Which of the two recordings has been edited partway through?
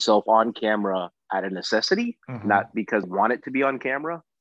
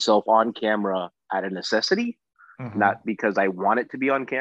first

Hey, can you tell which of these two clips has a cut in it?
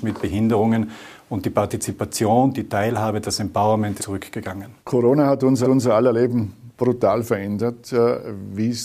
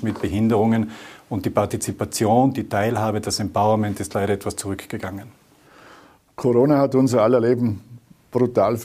first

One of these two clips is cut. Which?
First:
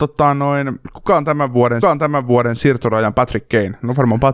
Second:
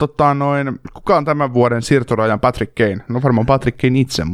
first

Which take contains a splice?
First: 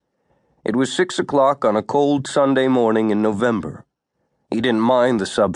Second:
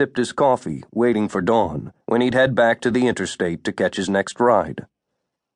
second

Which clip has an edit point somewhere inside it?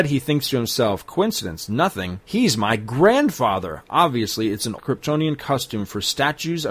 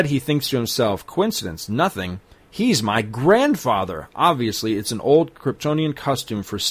first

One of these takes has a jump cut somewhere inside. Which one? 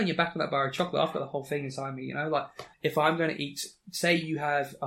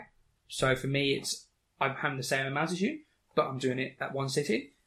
first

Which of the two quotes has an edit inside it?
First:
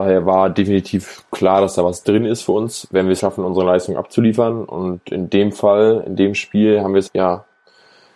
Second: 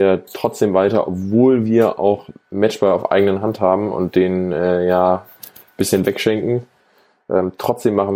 first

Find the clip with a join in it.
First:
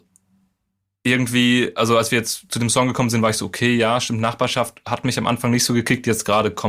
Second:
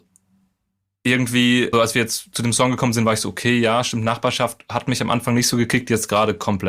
second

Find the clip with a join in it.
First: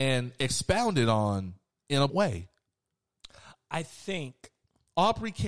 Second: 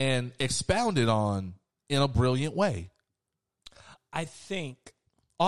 first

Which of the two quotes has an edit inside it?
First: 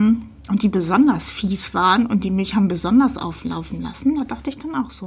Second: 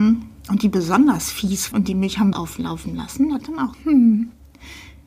second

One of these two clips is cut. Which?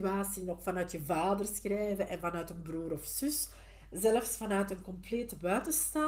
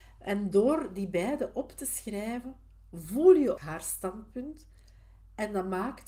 second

